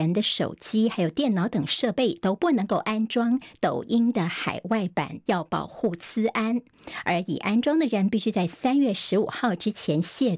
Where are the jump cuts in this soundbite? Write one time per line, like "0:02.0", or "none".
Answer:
0:05.3